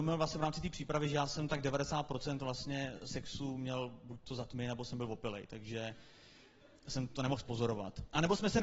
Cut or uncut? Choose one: uncut